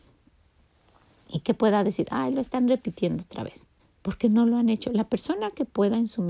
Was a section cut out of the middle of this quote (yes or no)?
yes